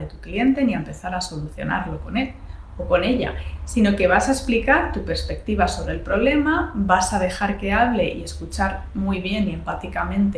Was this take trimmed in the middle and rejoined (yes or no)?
no